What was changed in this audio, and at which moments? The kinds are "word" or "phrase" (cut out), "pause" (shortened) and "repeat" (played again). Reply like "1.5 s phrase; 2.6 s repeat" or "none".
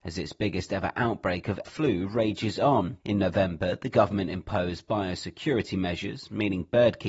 1.6 s word; 3.0 s pause